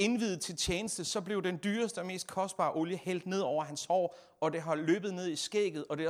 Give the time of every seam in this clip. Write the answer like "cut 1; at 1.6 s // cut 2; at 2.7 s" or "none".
none

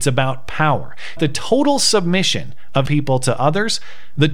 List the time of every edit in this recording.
cut 1; at 1.2 s // cut 2; at 2.9 s

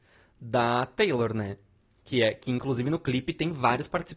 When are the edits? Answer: none

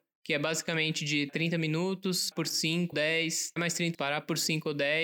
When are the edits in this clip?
cut 1; at 1.3 s // cut 2; at 2.3 s // cut 3; at 2.9 s // cut 4; at 3.6 s // cut 5; at 3.9 s

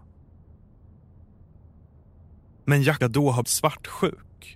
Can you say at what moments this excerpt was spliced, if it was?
cut 1; at 3.0 s // cut 2; at 3.4 s

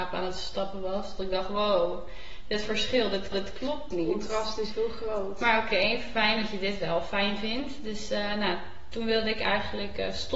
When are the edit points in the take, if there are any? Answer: cut 1; at 3.3 s

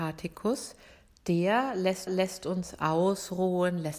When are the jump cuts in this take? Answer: cut 1; at 2.1 s

